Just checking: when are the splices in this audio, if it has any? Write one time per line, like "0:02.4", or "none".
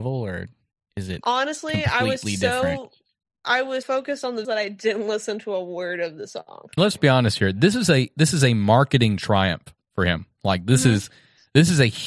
0:03.8
0:04.4
0:06.8